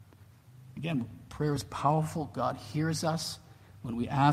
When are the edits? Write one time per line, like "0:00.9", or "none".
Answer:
none